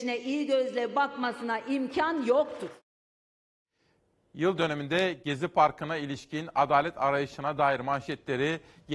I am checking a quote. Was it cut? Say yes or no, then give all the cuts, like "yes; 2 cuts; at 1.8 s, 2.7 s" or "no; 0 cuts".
no; 0 cuts